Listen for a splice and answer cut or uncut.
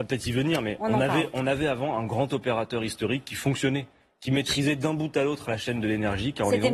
uncut